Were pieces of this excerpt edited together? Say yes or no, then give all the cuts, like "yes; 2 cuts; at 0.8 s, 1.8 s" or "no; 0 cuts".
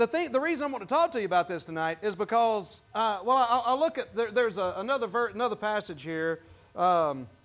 yes; 1 cut; at 2.9 s